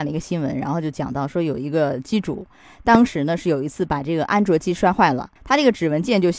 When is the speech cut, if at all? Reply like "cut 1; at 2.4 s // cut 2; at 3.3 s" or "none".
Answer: cut 1; at 5.4 s

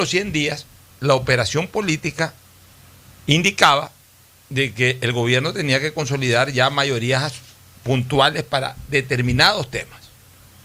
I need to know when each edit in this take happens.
none

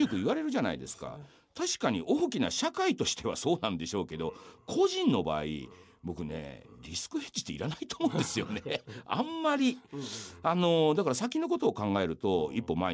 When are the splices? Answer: none

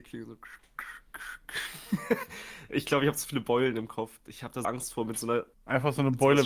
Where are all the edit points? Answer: cut 1; at 4.6 s // cut 2; at 5.5 s

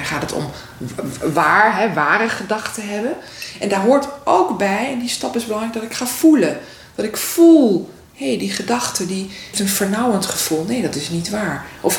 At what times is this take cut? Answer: cut 1; at 9.5 s

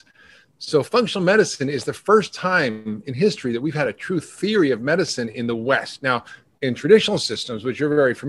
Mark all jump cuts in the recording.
none

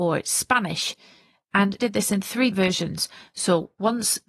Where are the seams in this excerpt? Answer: cut 1; at 1.8 s // cut 2; at 2.5 s

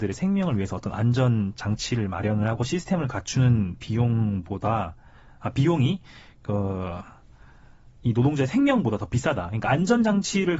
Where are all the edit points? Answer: none

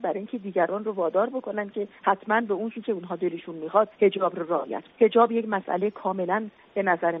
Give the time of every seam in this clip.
cut 1; at 2.0 s // cut 2; at 2.7 s // cut 3; at 3.9 s // cut 4; at 4.9 s

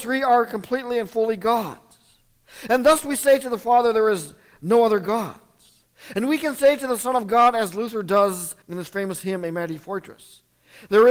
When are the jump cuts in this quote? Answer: cut 1; at 8.6 s

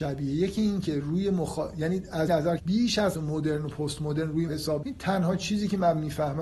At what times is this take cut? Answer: cut 1; at 2.3 s // cut 2; at 2.6 s // cut 3; at 3.1 s // cut 4; at 4.5 s // cut 5; at 4.8 s

